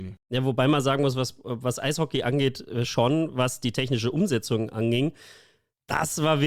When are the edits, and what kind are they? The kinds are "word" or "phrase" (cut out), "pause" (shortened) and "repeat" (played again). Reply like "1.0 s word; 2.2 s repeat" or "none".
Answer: none